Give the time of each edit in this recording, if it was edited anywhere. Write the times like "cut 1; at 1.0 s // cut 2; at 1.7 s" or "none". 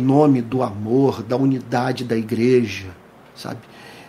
none